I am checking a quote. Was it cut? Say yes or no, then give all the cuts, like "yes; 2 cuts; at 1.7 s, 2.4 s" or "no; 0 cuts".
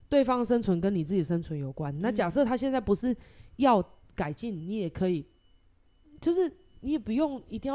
no; 0 cuts